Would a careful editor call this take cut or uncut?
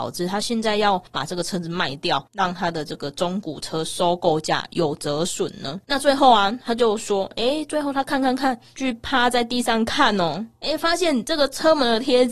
uncut